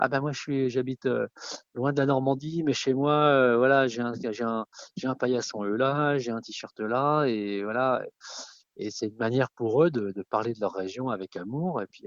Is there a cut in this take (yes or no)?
no